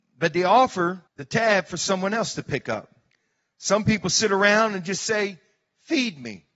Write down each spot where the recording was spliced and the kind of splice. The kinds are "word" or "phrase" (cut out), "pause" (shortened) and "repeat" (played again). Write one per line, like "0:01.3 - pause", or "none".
0:01.1 - pause
0:03.1 - pause